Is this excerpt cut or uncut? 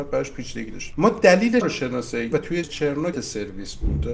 cut